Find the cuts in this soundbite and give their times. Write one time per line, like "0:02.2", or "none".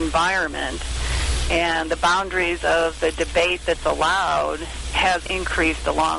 none